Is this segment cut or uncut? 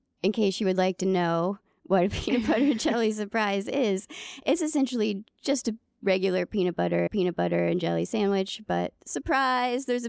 cut